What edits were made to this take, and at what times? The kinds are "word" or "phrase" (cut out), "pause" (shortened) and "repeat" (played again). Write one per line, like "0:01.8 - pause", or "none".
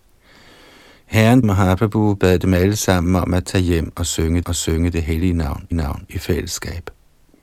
0:01.4 - word
0:04.4 - repeat
0:05.7 - repeat